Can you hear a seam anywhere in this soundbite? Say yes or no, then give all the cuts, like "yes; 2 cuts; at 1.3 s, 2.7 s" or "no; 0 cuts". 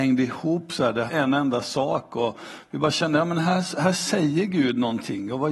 yes; 1 cut; at 1.1 s